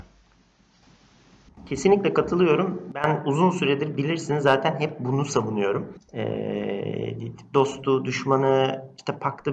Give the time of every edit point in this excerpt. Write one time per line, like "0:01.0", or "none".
0:06.0